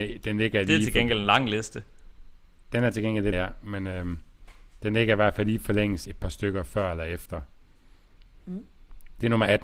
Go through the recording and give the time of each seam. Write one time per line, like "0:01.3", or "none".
0:03.3
0:06.1